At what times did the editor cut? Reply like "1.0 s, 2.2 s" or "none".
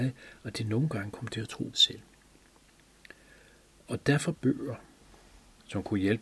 1.7 s, 4.3 s